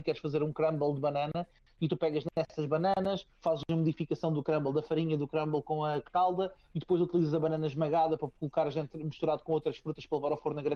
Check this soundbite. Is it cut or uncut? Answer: uncut